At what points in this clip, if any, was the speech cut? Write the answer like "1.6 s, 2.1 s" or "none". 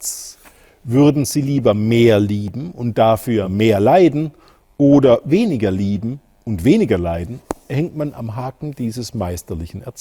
none